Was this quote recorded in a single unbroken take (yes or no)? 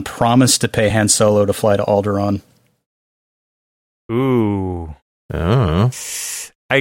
yes